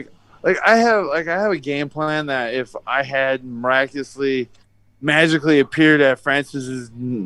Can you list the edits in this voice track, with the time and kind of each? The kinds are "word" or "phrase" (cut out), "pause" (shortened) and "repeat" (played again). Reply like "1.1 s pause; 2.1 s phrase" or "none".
none

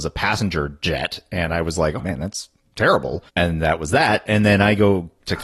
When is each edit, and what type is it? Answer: 2.0 s word; 3.3 s pause

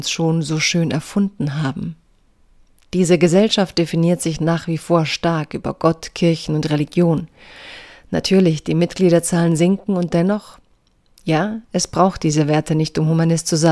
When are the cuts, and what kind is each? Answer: none

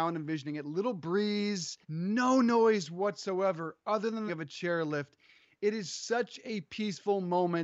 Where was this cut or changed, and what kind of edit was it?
1.8 s pause; 4.3 s phrase

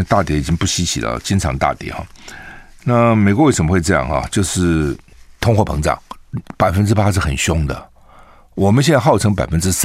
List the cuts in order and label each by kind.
none

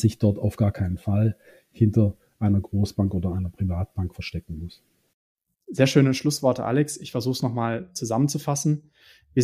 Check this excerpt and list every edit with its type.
none

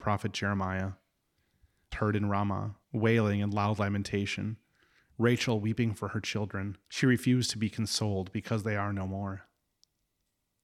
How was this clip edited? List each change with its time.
1.9 s phrase; 2.8 s pause; 6.8 s pause

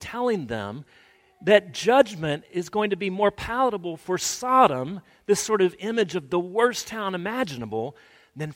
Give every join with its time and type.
none

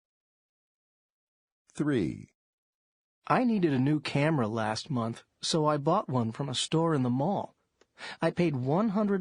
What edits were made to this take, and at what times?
none

